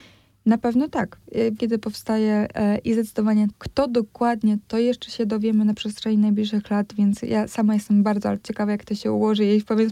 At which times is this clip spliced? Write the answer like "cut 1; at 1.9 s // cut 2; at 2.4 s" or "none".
cut 1; at 1.6 s // cut 2; at 3.5 s // cut 3; at 8.4 s